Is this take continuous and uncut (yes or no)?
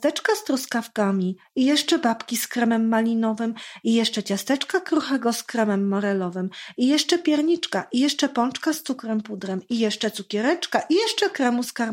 yes